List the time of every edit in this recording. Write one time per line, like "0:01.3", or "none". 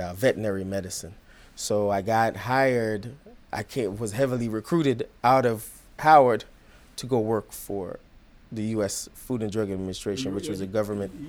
none